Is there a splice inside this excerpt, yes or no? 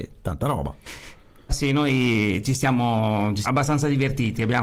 yes